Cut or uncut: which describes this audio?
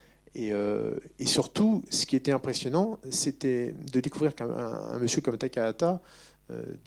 uncut